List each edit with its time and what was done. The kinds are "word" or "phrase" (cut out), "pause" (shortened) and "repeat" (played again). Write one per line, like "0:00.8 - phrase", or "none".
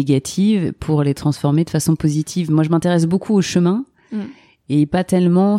none